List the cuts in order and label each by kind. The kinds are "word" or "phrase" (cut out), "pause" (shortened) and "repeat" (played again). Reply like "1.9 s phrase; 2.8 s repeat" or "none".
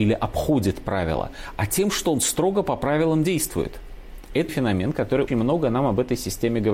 4.5 s word; 5.3 s word

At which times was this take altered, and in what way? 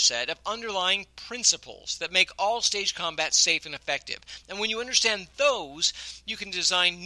none

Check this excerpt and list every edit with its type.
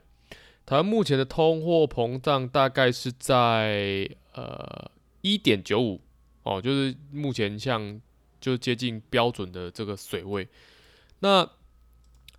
4.2 s pause

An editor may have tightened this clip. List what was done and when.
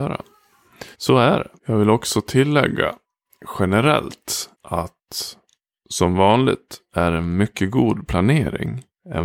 0.9 s pause; 1.6 s pause; 4.5 s pause

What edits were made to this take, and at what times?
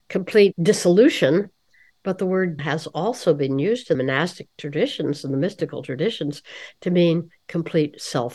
2.6 s word; 3.9 s word

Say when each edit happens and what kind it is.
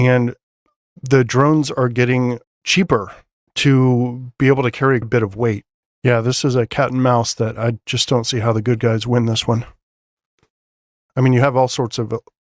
2.4 s pause; 5.0 s word; 5.8 s pause

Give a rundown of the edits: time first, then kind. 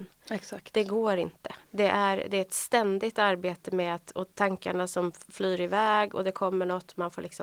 1.6 s pause

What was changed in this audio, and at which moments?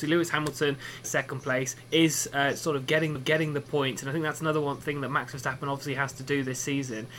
1.0 s phrase; 1.8 s pause; 3.2 s repeat

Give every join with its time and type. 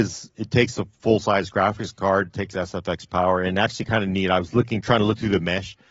none

